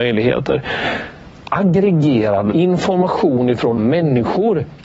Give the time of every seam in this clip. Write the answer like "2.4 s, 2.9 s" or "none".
2.5 s, 3.8 s